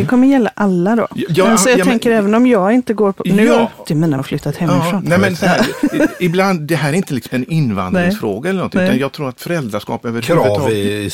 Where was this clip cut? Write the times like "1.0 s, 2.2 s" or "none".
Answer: 3.8 s, 4.2 s, 7.3 s

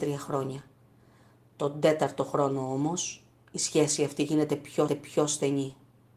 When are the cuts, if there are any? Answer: 4.9 s

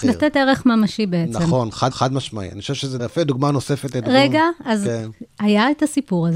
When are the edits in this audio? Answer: 1.9 s, 3.0 s

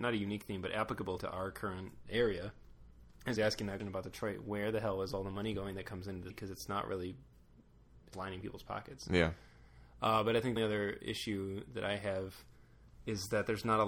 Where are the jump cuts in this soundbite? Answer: 1.2 s, 3.4 s, 3.8 s, 6.3 s, 8.1 s, 10.6 s

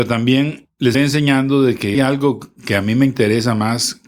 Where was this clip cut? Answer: 0.9 s, 1.9 s

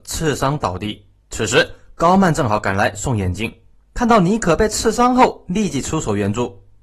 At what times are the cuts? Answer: 1.2 s, 3.8 s

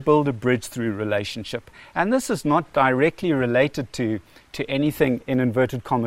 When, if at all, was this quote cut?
none

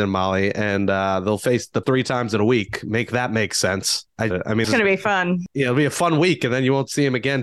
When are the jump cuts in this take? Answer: 1.8 s, 4.3 s, 4.6 s

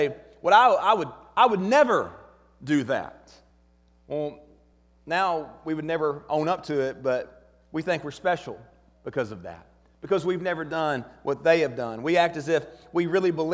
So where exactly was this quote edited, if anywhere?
none

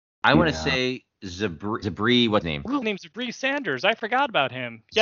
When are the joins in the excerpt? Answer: 1.8 s, 2.4 s, 2.8 s

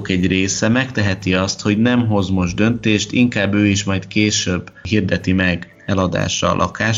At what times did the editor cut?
none

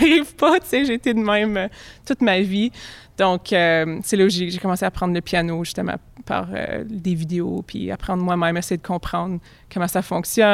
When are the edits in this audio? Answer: none

